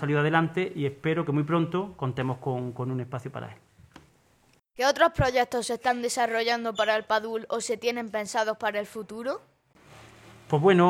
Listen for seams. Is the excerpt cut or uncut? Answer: uncut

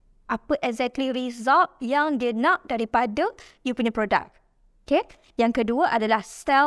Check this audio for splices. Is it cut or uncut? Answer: uncut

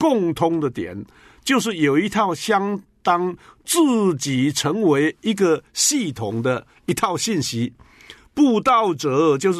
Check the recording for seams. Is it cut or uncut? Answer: uncut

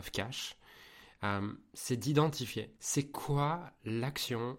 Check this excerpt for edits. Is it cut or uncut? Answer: cut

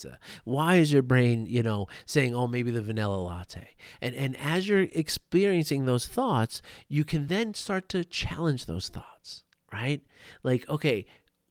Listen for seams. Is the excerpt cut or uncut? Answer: uncut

